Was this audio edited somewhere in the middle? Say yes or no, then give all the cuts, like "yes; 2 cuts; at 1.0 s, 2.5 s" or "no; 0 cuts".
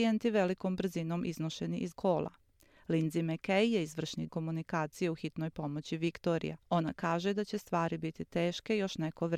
yes; 3 cuts; at 1.9 s, 4.3 s, 6.6 s